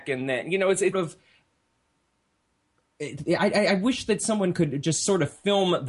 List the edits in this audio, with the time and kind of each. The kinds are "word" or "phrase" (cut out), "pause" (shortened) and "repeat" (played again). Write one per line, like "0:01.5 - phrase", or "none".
0:00.9 - phrase

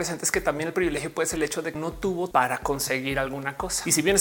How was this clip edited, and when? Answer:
0:01.4 - word
0:01.7 - word
0:02.3 - word

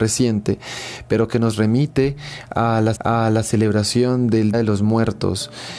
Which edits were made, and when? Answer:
0:02.9 - repeat
0:04.5 - word

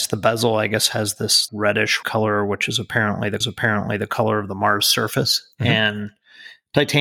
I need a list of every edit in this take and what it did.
0:01.5 - word
0:02.0 - word
0:03.4 - repeat
0:05.5 - pause

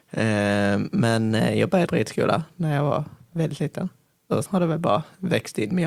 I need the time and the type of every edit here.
0:01.9 - word
0:04.5 - word

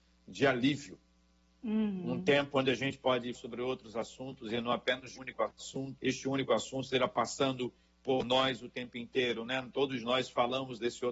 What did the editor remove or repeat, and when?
0:03.3 - word
0:05.2 - word
0:06.0 - word

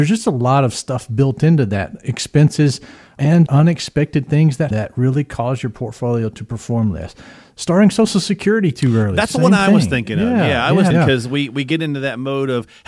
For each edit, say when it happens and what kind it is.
0:03.5 - word
0:04.7 - word
0:10.9 - word

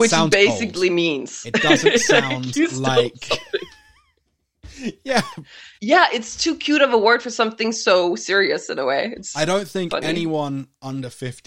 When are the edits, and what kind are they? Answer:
0:05.8 - pause

